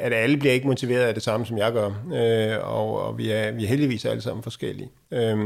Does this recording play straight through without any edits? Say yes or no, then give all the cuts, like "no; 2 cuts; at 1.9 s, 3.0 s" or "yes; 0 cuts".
yes; 0 cuts